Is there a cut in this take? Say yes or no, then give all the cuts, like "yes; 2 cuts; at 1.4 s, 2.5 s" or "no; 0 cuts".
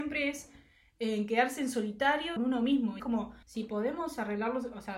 yes; 3 cuts; at 2.4 s, 3.0 s, 3.4 s